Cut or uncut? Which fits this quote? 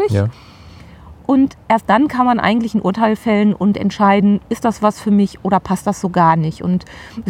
uncut